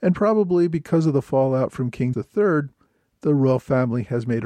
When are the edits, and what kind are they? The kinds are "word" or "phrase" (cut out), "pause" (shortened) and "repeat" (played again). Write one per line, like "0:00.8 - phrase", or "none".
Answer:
0:02.1 - word